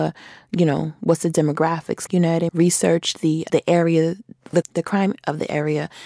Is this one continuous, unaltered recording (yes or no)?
no